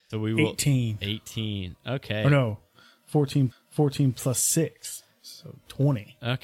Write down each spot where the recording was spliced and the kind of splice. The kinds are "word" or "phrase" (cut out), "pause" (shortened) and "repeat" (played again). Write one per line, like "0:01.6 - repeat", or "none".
0:03.5 - repeat